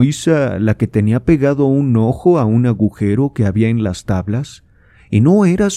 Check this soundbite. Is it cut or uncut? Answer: uncut